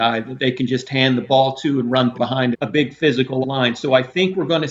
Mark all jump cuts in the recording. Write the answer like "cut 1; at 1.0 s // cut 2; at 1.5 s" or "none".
cut 1; at 2.1 s // cut 2; at 2.5 s // cut 3; at 3.4 s